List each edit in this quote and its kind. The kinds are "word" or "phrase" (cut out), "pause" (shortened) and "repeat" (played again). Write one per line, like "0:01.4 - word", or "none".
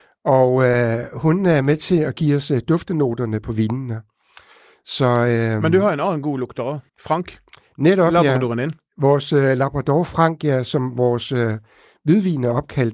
0:06.9 - pause